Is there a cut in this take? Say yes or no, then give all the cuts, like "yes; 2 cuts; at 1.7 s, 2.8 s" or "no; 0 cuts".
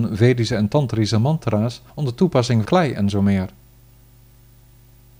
yes; 2 cuts; at 1.9 s, 2.6 s